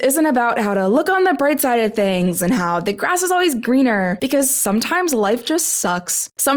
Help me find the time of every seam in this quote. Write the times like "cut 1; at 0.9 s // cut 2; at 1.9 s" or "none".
none